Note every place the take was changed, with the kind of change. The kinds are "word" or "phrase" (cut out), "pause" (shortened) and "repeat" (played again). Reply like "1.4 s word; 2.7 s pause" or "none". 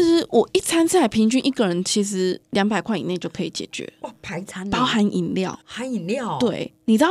2.4 s pause; 5.6 s pause